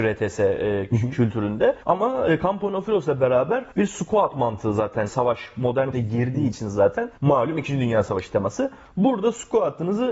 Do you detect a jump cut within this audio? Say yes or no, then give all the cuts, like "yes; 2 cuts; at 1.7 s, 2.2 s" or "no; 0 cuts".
yes; 5 cuts; at 1.8 s, 3.7 s, 5.1 s, 5.9 s, 7.2 s